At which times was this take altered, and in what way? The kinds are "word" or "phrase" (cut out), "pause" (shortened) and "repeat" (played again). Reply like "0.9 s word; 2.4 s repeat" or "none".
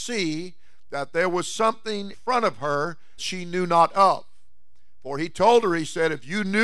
2.1 s word; 3.2 s word

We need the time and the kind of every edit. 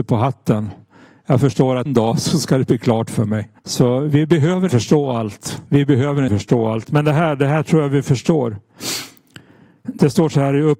1.9 s word; 3.6 s pause; 4.7 s word; 5.7 s pause; 6.3 s word

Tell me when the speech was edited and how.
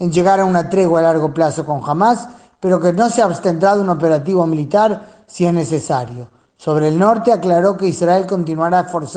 none

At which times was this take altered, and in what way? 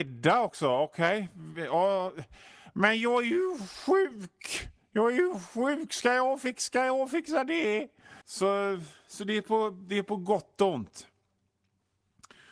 8.2 s pause

